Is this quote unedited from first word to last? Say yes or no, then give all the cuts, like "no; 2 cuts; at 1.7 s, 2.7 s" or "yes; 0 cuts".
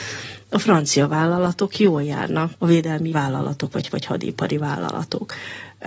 no; 3 cuts; at 2.5 s, 3.1 s, 3.9 s